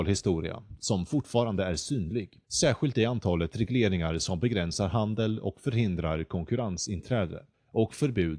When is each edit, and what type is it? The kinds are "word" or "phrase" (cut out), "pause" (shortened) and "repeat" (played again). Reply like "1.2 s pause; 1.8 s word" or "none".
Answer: 2.4 s pause